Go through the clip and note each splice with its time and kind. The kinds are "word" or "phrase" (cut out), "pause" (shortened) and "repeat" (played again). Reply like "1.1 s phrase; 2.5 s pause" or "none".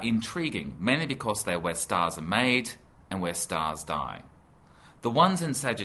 none